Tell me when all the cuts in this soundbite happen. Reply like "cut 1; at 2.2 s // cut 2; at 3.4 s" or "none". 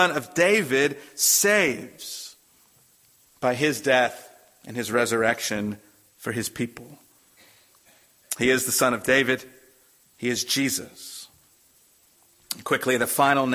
none